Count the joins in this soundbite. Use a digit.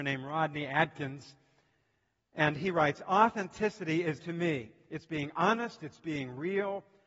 1